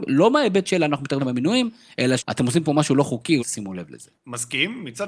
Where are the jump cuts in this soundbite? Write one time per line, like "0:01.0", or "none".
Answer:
0:01.2
0:02.2
0:03.4
0:04.1